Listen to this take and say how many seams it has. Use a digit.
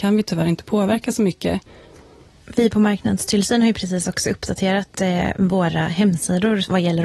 0